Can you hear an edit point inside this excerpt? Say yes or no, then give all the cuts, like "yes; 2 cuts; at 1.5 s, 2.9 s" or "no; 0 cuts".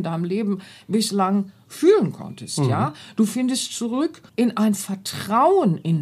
yes; 1 cut; at 4.3 s